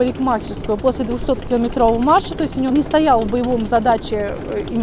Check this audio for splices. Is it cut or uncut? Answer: cut